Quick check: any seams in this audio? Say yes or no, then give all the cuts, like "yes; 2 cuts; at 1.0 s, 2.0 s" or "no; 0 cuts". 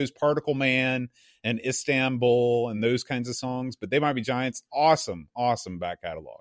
no; 0 cuts